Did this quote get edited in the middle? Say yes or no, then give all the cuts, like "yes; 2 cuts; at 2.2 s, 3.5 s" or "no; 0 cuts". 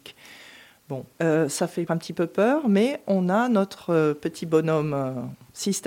yes; 2 cuts; at 1.1 s, 1.9 s